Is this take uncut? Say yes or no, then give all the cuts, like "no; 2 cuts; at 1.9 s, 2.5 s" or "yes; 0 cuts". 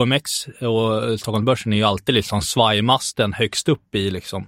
yes; 0 cuts